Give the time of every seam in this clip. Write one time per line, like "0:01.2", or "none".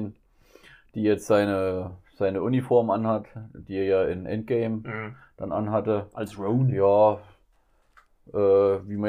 none